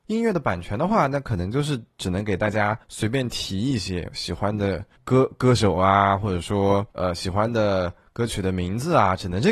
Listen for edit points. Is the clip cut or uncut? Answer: cut